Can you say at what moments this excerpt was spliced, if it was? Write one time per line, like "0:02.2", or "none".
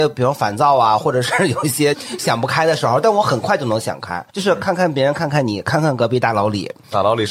0:04.3